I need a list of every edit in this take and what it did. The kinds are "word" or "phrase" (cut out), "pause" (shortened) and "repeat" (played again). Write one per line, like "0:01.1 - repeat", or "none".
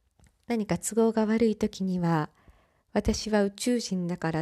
none